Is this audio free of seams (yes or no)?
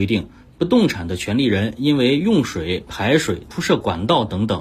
no